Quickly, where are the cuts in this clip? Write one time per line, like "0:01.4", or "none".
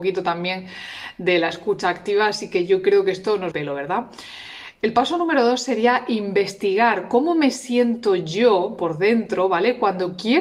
0:03.5